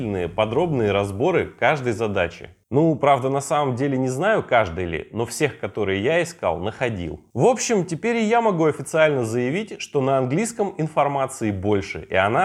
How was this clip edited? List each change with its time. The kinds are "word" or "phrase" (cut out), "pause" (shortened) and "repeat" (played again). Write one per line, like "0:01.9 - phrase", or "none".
none